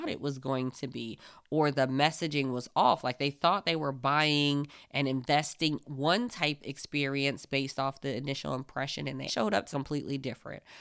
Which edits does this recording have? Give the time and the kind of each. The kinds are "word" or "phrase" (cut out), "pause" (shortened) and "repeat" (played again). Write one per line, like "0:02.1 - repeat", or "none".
0:05.8 - word
0:06.6 - word
0:09.3 - word
0:09.7 - word